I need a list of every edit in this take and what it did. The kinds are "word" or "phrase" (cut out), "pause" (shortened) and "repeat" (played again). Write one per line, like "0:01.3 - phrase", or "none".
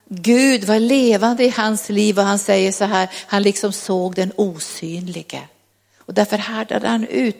none